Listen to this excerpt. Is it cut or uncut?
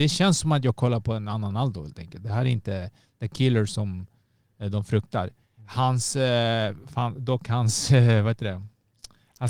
uncut